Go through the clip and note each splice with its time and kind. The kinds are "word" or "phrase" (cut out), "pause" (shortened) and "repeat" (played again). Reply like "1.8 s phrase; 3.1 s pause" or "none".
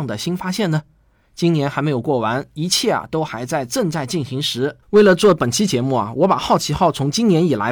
4.8 s pause